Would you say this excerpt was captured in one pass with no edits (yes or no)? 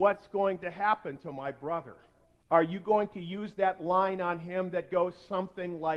no